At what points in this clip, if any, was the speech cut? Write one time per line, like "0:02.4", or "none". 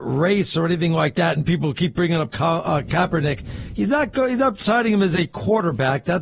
none